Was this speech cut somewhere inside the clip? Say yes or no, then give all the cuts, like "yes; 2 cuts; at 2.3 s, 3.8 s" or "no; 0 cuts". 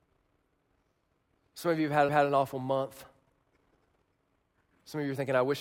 yes; 1 cut; at 2.1 s